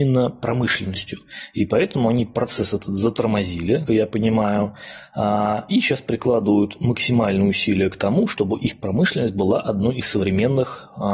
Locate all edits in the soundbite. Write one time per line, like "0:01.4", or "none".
0:03.9
0:10.0